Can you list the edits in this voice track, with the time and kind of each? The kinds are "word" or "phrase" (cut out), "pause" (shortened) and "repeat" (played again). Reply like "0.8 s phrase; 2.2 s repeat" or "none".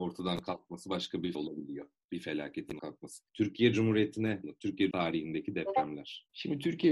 1.3 s word; 2.8 s word; 3.3 s pause; 4.4 s word; 4.9 s word

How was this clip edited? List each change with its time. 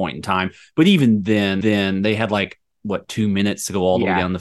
1.6 s repeat

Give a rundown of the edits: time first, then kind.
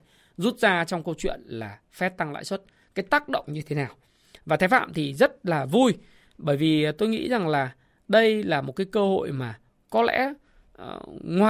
none

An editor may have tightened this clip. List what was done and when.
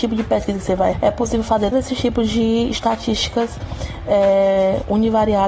0.9 s word; 1.7 s word

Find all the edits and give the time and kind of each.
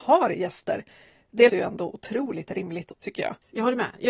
1.5 s word; 2.9 s word

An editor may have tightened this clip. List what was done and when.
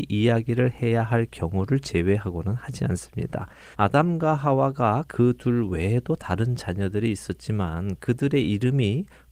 3.7 s pause; 5.1 s phrase

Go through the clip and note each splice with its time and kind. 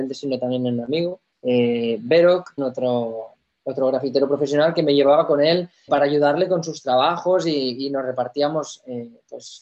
1.3 s pause; 2.6 s word; 5.9 s word

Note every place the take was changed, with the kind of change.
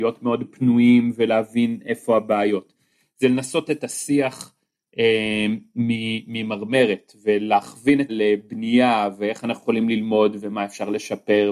3.7 s word; 8.1 s word

